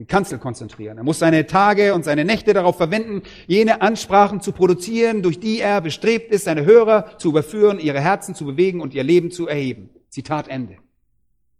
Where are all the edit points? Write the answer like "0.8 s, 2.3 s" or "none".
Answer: none